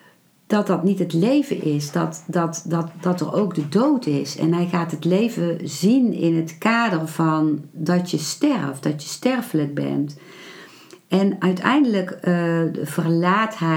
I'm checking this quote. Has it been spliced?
no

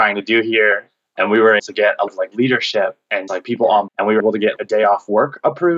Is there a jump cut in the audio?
yes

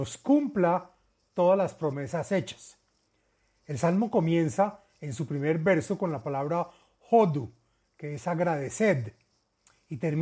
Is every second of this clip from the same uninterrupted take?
yes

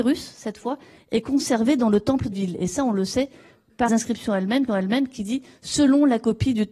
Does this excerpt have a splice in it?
yes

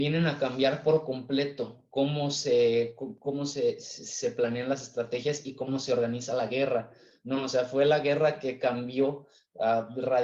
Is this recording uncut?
yes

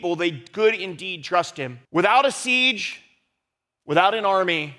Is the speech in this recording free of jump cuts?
no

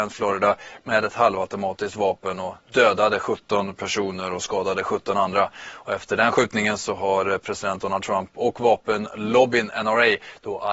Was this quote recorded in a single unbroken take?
yes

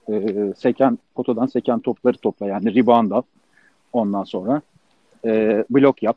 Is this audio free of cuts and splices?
yes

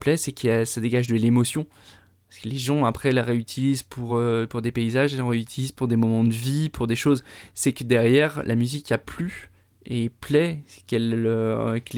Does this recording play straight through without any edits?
yes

